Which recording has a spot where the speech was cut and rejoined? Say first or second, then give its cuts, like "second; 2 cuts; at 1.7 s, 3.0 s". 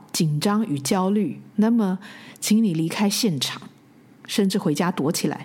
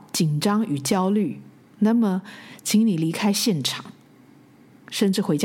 first; 2 cuts; at 1.5 s, 3.8 s